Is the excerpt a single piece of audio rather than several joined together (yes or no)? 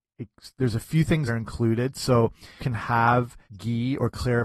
no